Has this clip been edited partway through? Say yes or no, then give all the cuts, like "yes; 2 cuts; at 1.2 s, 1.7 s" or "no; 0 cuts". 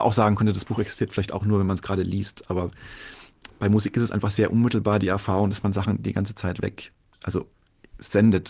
no; 0 cuts